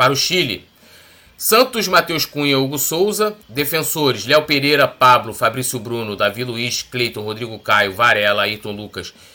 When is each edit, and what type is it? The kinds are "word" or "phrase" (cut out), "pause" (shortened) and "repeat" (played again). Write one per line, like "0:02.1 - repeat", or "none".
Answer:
0:03.4 - pause